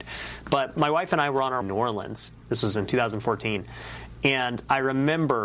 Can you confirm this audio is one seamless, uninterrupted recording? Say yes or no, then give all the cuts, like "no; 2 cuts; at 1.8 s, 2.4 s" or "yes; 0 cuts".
no; 1 cut; at 1.6 s